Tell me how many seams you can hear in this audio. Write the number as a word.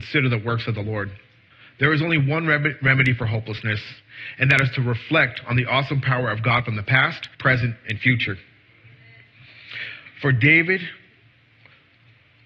two